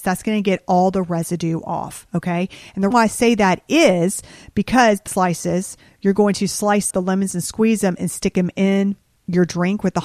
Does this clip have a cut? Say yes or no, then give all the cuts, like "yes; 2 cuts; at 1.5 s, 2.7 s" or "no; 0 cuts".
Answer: yes; 3 cuts; at 2.9 s, 5.1 s, 6.9 s